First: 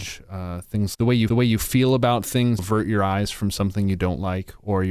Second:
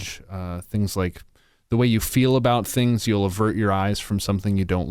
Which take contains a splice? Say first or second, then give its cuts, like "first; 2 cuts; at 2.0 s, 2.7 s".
first; 3 cuts; at 0.9 s, 1.3 s, 2.6 s